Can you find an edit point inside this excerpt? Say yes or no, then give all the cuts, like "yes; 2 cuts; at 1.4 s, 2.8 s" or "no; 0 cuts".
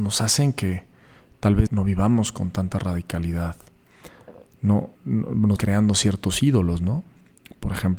yes; 3 cuts; at 1.7 s, 5.0 s, 5.6 s